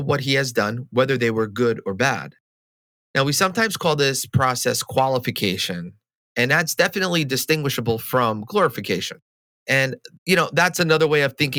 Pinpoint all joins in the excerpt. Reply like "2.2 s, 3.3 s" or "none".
10.1 s